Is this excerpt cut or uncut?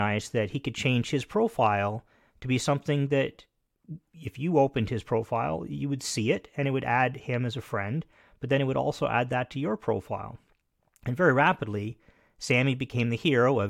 uncut